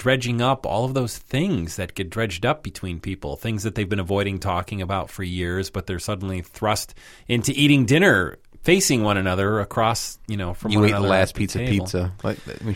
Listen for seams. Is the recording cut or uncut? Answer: uncut